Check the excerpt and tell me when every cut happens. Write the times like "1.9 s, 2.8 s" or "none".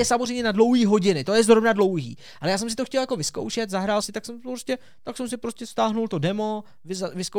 4.0 s